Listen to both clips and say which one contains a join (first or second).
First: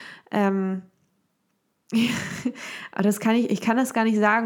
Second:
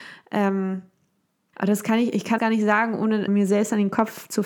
second